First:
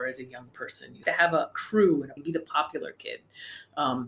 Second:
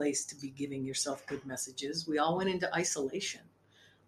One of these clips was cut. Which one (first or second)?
first